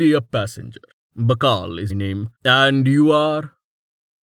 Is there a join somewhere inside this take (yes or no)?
yes